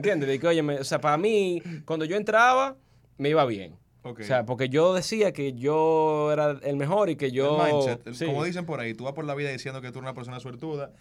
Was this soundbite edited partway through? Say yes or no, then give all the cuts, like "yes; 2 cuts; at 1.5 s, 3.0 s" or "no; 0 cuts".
no; 0 cuts